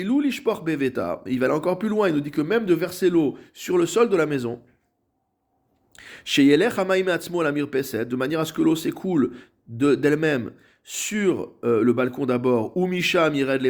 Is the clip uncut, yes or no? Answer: yes